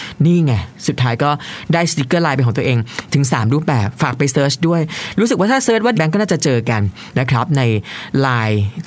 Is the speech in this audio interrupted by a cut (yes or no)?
yes